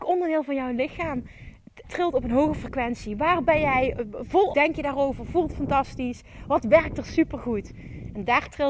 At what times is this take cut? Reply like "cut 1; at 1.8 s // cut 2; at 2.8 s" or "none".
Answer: cut 1; at 1.8 s // cut 2; at 4.5 s

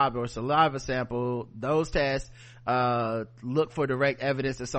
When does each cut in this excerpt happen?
none

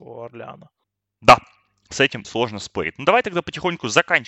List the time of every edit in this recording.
cut 1; at 2.2 s

